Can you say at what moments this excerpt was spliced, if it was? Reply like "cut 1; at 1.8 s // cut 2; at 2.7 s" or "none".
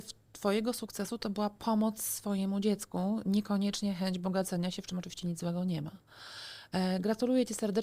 none